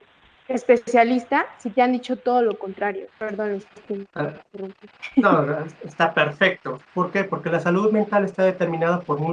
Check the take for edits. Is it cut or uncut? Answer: cut